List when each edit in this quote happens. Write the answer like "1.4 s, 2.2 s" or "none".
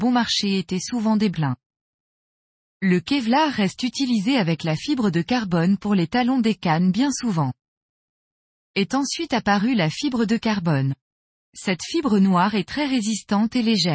1.3 s